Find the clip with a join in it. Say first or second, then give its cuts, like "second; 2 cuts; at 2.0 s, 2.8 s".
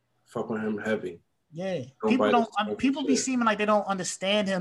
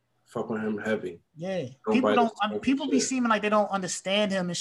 second; 1 cut; at 1.3 s